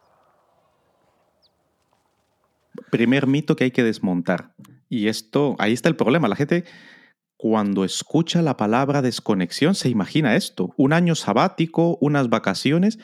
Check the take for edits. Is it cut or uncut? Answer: uncut